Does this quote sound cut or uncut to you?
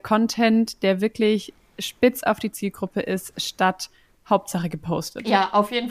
uncut